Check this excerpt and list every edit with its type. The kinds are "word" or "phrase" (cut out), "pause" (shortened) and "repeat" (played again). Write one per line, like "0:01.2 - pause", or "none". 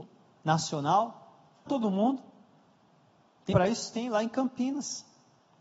0:01.7 - word
0:03.5 - word